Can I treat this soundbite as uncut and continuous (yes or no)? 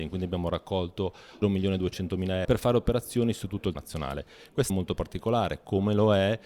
no